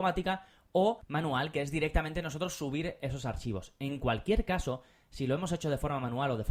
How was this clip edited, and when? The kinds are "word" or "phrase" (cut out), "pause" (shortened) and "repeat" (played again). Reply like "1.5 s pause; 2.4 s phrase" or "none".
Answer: none